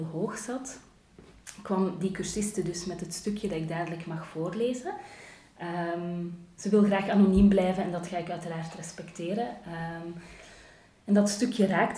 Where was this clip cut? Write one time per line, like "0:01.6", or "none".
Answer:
none

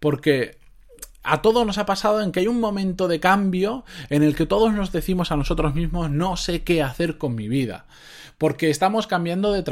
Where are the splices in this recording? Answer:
none

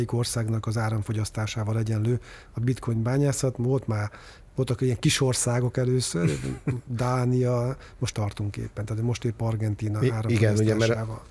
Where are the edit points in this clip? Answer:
0:08.1

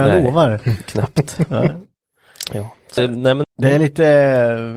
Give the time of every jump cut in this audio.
0:03.0
0:03.4

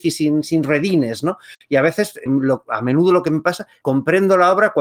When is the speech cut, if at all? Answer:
0:02.3
0:03.8

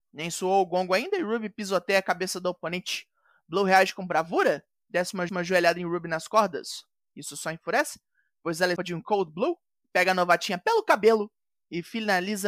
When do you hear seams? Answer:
0:05.3
0:08.8

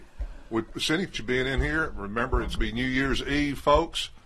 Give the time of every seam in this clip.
0:01.1
0:02.6

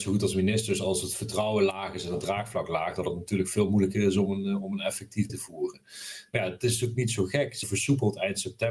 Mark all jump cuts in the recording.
0:05.3
0:07.6

